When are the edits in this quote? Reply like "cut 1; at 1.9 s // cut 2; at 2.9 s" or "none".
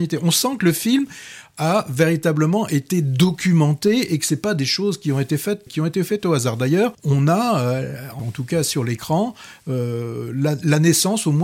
cut 1; at 5.7 s // cut 2; at 6.9 s // cut 3; at 8.2 s